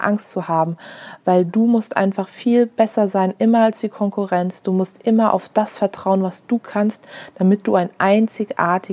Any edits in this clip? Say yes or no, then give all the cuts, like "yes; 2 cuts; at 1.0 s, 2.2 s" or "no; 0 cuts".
no; 0 cuts